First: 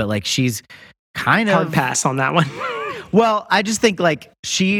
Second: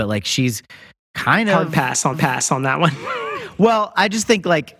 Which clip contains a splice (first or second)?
second